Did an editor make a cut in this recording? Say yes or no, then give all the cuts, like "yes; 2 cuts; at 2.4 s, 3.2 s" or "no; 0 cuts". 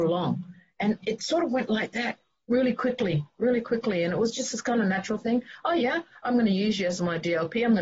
no; 0 cuts